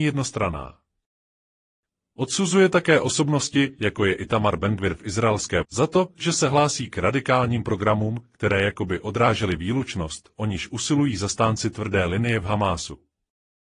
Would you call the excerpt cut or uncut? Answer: cut